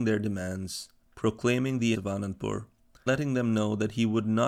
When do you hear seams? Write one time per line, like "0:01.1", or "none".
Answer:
0:01.0
0:01.9
0:03.1